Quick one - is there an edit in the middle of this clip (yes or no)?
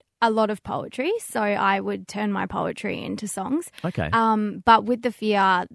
no